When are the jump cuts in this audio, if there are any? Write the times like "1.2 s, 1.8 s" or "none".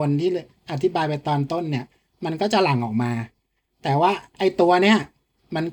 none